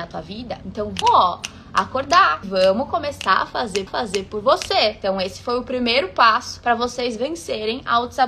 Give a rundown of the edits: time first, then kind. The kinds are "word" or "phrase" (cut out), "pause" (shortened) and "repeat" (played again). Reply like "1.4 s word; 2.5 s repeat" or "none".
1.0 s word; 2.4 s word; 3.9 s repeat